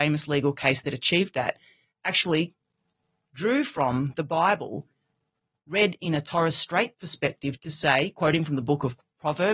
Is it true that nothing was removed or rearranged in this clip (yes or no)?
yes